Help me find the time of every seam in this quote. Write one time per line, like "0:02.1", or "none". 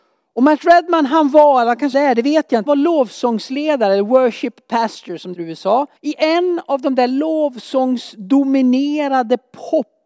0:01.9
0:02.7
0:05.3
0:06.0